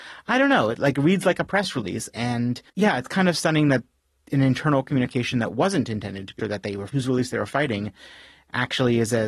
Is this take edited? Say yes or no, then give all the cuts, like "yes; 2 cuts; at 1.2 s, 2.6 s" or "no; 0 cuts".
yes; 3 cuts; at 2.7 s, 6.4 s, 6.9 s